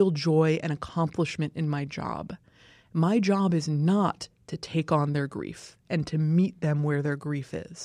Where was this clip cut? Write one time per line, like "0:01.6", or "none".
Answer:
none